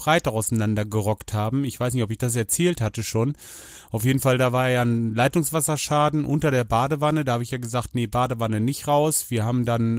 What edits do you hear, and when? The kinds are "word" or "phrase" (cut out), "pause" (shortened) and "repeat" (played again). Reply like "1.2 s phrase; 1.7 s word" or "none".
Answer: none